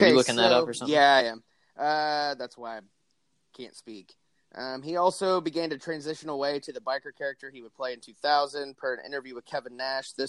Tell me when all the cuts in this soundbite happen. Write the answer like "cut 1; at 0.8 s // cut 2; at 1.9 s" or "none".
none